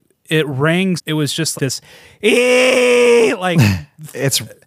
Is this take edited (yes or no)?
yes